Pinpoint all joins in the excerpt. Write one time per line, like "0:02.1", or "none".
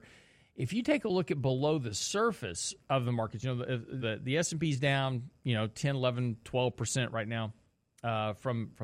0:04.0

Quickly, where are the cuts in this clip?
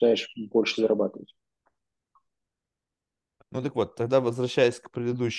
none

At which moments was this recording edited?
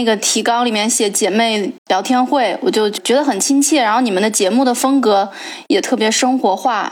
0:01.8

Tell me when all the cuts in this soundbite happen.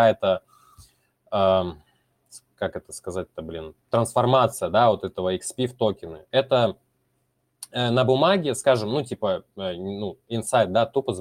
0:03.8

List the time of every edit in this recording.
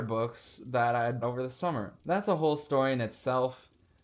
0:01.2
0:02.0

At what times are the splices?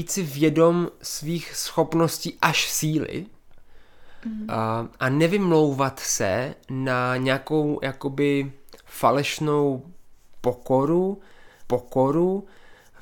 0:11.6

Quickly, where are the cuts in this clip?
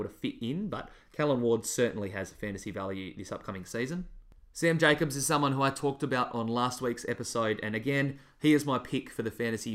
none

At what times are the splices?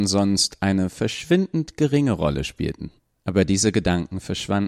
0:03.0

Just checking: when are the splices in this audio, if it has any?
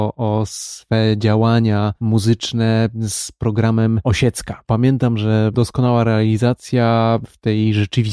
none

